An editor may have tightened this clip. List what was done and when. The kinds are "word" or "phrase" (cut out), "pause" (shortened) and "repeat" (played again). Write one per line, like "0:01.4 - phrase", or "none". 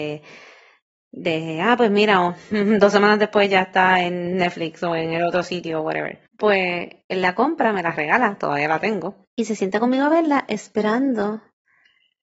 0:06.3 - pause
0:09.2 - pause